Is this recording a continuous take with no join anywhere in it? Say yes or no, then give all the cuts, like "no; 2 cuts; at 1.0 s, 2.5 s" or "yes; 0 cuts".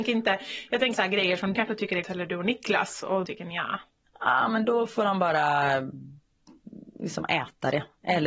no; 4 cuts; at 0.9 s, 1.5 s, 2.0 s, 3.2 s